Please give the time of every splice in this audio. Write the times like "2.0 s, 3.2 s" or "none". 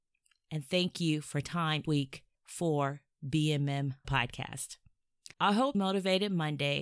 1.4 s, 1.8 s, 2.3 s, 4.0 s, 5.3 s, 5.7 s